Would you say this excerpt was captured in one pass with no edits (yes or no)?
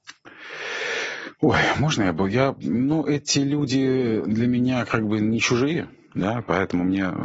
yes